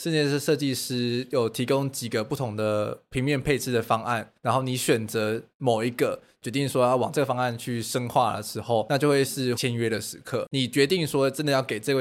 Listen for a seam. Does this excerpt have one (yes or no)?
yes